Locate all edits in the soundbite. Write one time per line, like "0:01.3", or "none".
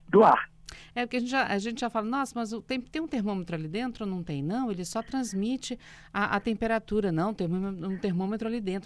none